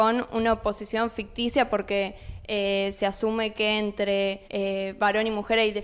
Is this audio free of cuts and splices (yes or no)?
no